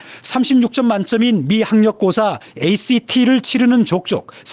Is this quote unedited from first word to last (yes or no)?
yes